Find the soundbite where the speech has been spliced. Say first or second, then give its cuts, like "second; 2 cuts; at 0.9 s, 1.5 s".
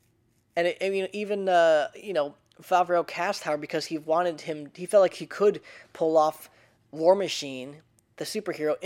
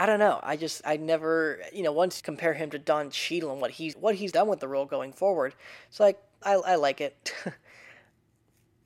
second; 4 cuts; at 2.2 s, 3.9 s, 4.3 s, 6.4 s